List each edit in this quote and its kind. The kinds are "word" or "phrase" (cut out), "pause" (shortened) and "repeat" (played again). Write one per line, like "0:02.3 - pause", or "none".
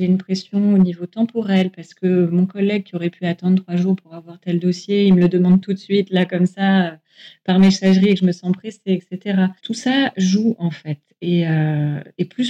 0:09.6 - pause